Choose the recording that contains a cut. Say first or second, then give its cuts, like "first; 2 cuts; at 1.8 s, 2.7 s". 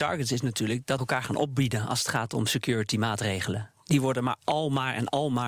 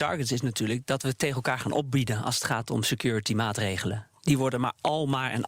first; 1 cut; at 1.0 s